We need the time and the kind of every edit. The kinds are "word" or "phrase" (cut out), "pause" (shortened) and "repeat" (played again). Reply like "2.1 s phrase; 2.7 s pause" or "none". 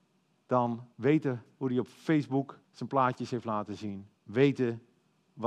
0.9 s pause; 2.6 s pause; 4.2 s pause